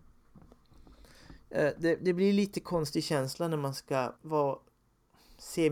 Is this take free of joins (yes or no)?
no